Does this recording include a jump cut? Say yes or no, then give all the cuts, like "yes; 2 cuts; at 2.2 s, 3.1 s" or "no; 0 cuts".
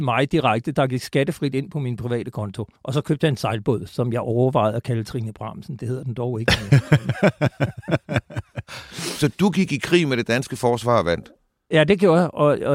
yes; 1 cut; at 2.8 s